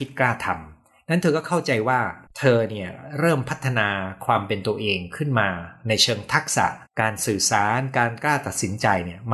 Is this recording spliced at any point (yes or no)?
yes